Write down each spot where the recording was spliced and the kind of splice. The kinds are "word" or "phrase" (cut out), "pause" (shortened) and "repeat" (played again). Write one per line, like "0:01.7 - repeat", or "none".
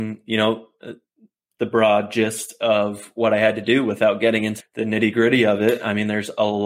0:04.6 - word